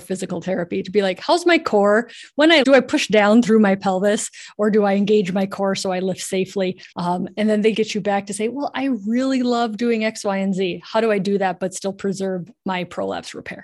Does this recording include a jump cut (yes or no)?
yes